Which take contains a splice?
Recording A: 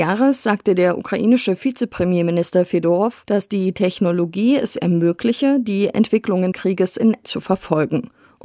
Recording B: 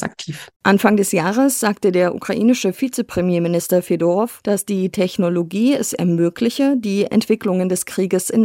A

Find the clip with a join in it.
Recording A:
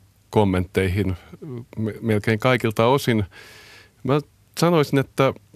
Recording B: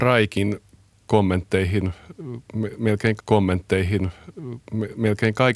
B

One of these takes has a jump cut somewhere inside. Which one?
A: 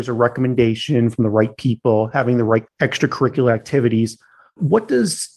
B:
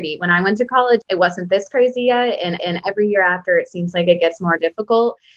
B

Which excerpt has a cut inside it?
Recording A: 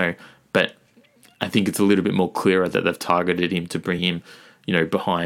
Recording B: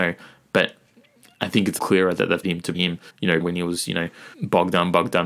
B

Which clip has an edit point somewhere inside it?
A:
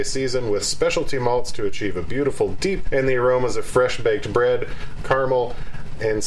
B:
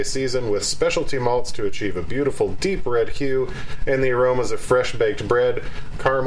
A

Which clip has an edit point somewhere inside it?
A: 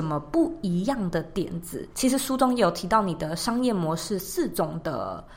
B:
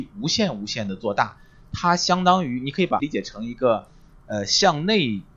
B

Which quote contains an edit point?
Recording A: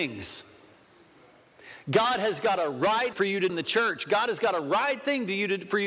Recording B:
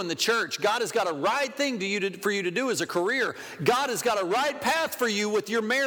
A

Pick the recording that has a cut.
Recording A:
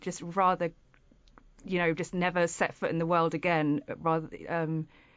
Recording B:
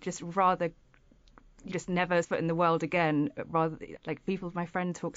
B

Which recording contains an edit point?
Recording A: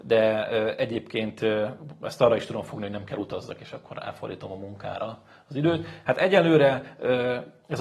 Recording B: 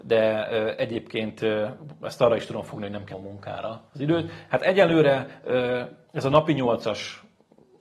B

